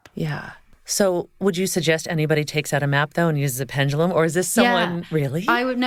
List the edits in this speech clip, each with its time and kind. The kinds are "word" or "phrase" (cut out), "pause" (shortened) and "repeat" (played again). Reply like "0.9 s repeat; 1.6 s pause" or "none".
none